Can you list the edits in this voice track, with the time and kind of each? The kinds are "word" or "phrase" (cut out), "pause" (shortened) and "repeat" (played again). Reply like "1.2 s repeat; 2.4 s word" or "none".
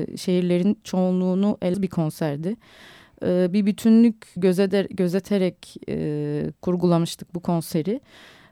1.7 s word; 4.4 s word; 6.6 s word